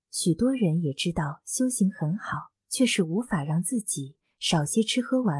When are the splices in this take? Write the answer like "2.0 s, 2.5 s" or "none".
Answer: 2.6 s